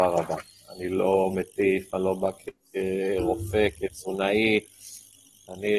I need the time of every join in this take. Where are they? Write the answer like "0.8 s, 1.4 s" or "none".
none